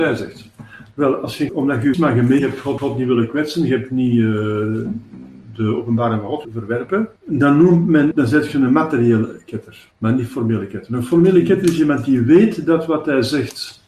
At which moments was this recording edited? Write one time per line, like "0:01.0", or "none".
0:01.5
0:01.9
0:02.4
0:02.8
0:06.4
0:07.2
0:08.1
0:09.9